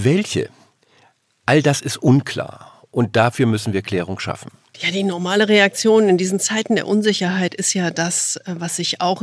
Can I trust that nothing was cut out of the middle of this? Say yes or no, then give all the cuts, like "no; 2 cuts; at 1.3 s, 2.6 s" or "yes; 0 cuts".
yes; 0 cuts